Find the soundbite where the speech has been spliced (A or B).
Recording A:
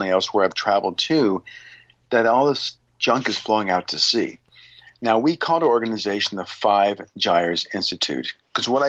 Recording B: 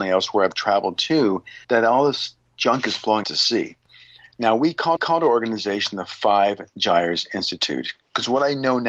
B